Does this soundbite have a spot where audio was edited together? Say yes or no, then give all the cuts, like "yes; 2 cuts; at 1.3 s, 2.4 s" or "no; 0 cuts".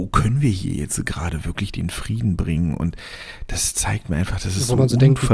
no; 0 cuts